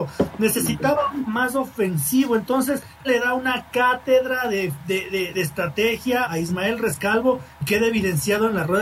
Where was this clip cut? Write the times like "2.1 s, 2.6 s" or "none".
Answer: 1.3 s, 3.0 s, 5.3 s, 6.2 s, 7.5 s